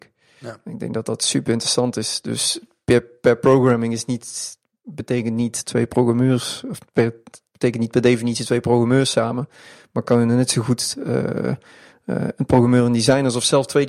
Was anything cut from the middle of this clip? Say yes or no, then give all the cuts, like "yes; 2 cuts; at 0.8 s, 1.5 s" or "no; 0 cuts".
no; 0 cuts